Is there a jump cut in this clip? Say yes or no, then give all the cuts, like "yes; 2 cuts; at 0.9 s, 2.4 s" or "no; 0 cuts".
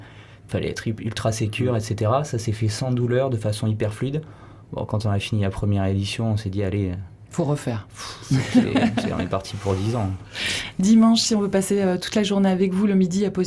no; 0 cuts